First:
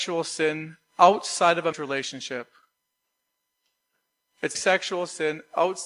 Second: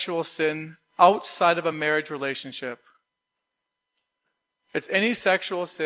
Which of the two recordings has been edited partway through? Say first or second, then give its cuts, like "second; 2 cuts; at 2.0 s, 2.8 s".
first; 2 cuts; at 1.7 s, 4.5 s